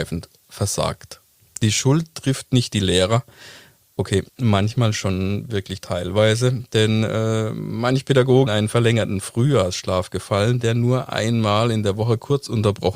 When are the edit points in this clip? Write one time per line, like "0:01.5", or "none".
0:04.3
0:08.5